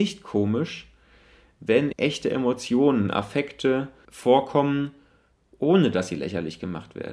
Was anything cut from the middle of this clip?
yes; 2 cuts; at 1.9 s, 4.0 s

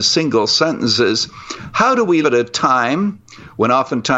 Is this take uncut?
no; 1 cut; at 2.2 s

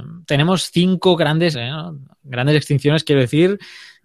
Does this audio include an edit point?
yes; 1 cut; at 1.5 s

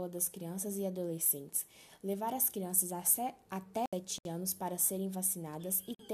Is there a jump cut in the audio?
no; 0 cuts

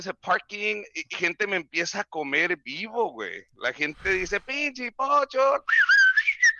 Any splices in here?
yes; 1 cut; at 1.1 s

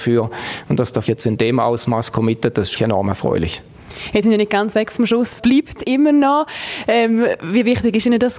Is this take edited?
yes; 4 cuts; at 1.0 s, 2.8 s, 4.2 s, 5.4 s

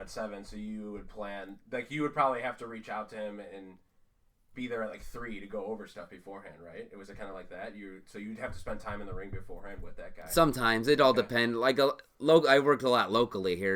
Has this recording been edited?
no; 0 cuts

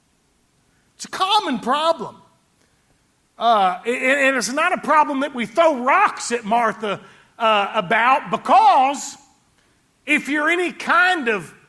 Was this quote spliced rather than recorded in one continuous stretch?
no; 0 cuts

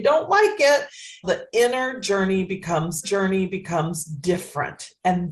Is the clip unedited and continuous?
no; 2 cuts; at 1.2 s, 3.0 s

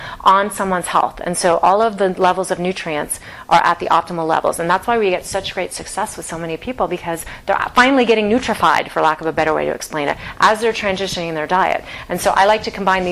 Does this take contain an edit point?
no; 0 cuts

